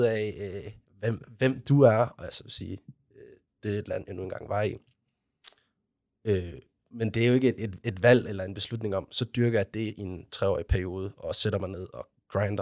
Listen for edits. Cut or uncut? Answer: uncut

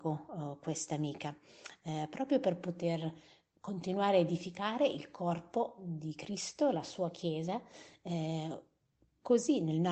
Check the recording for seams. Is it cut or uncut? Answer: uncut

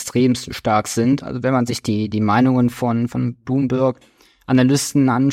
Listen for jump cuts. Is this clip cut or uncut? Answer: uncut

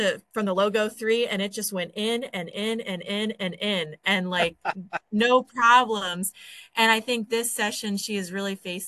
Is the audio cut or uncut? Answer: uncut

